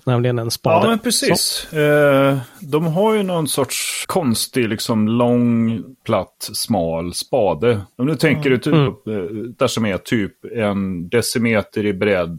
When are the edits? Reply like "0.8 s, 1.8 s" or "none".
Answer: 4.0 s, 8.9 s, 9.6 s